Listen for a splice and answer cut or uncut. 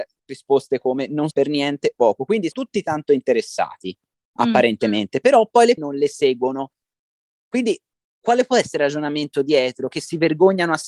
cut